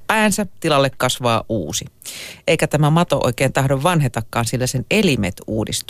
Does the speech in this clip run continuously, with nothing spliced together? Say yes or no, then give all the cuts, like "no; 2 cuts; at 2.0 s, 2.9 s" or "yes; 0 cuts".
yes; 0 cuts